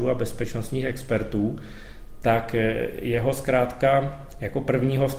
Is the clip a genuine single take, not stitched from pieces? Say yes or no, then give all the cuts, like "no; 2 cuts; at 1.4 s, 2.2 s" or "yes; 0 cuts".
yes; 0 cuts